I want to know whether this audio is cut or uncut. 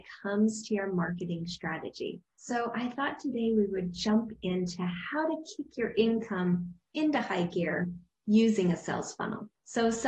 uncut